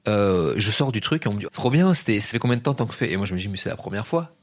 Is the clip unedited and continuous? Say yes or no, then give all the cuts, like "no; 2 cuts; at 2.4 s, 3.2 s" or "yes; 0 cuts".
no; 2 cuts; at 1.5 s, 2.3 s